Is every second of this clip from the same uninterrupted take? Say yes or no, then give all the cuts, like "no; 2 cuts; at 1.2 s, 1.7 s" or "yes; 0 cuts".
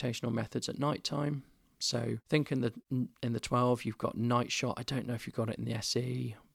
yes; 0 cuts